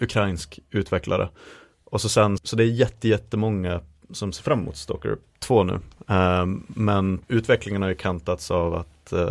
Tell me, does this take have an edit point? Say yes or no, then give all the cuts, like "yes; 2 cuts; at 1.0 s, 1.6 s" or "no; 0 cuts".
yes; 2 cuts; at 2.4 s, 7.2 s